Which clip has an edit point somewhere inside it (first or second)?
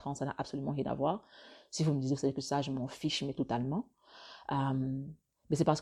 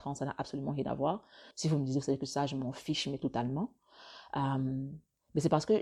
second